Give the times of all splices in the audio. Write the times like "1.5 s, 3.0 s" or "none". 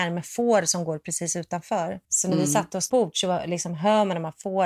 2.0 s, 2.9 s